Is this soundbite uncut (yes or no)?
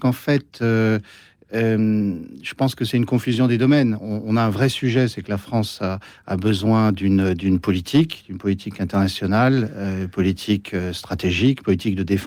yes